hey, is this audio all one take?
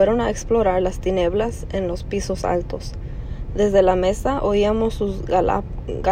yes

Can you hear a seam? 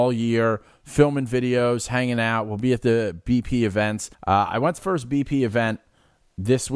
yes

